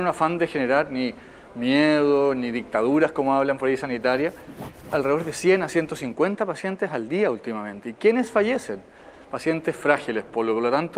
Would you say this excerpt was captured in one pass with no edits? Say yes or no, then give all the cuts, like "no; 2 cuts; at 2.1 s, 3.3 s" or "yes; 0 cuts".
no; 1 cut; at 4.8 s